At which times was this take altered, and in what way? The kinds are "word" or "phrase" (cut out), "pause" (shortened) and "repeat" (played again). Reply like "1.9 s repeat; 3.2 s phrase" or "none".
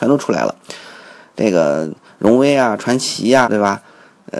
3.4 s word